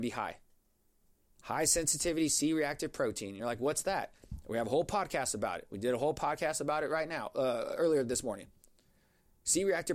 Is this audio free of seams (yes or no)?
yes